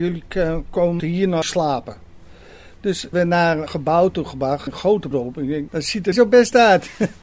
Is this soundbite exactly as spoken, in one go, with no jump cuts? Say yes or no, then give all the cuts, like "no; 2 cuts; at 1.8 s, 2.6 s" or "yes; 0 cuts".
no; 8 cuts; at 1.0 s, 1.4 s, 3.1 s, 3.7 s, 4.7 s, 5.1 s, 5.7 s, 6.1 s